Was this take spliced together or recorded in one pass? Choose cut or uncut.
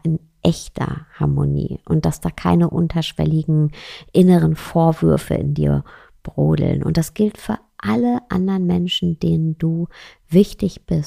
uncut